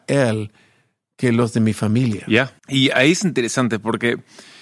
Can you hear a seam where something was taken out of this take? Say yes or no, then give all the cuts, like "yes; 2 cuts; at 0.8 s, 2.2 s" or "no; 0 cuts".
yes; 1 cut; at 2.6 s